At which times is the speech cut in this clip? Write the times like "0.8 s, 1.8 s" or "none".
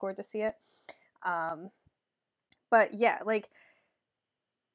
none